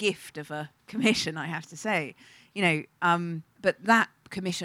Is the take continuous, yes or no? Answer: no